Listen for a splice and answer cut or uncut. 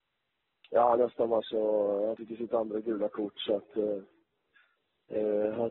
cut